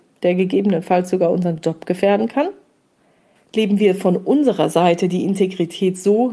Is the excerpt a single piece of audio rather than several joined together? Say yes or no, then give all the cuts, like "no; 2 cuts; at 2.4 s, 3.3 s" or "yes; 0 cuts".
yes; 0 cuts